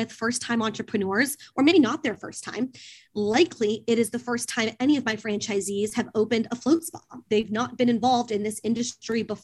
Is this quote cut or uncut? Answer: uncut